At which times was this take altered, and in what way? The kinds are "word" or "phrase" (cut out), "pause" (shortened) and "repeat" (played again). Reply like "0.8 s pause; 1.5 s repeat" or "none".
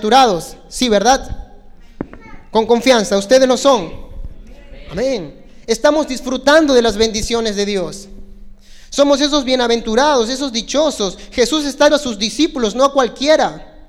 11.9 s word